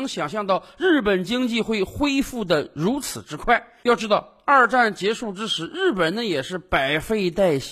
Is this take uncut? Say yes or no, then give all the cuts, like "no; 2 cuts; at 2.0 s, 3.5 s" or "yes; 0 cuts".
yes; 0 cuts